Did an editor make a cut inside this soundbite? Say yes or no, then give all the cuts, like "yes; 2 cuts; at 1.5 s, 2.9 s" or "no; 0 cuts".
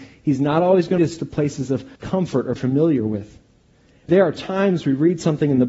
yes; 4 cuts; at 1.0 s, 2.0 s, 2.6 s, 4.1 s